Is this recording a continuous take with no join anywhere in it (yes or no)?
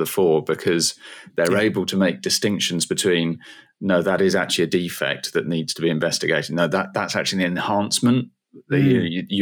yes